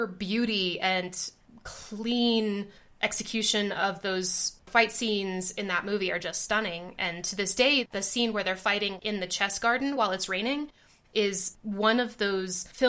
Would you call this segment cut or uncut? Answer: uncut